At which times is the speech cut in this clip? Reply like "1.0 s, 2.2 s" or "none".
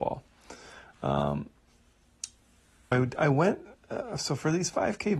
2.9 s